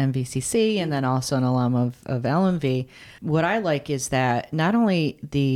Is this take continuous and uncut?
no; 1 cut; at 3.2 s

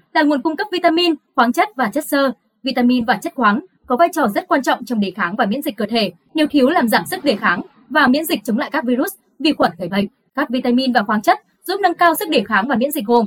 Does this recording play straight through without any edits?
yes; 0 cuts

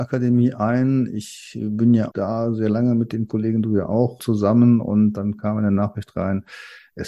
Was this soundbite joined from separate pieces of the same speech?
yes; 2 cuts; at 2.1 s, 4.2 s

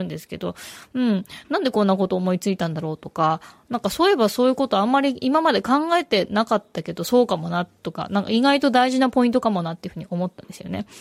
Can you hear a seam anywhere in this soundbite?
no; 0 cuts

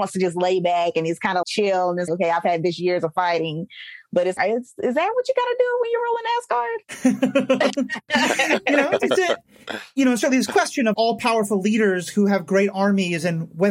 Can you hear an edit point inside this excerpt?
yes; 5 cuts; at 1.4 s, 2.1 s, 4.4 s, 5.1 s, 10.9 s

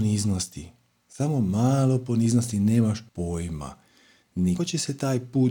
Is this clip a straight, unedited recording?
no; 2 cuts; at 3.1 s, 4.6 s

